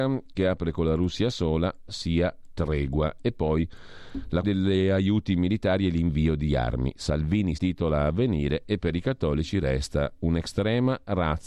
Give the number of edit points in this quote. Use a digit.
3